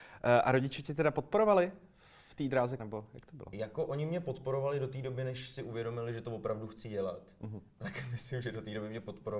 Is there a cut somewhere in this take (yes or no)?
yes